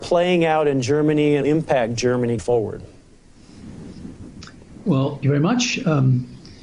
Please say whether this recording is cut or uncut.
cut